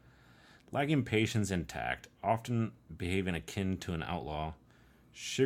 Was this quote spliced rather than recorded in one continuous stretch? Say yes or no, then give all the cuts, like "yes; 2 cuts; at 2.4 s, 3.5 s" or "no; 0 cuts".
no; 0 cuts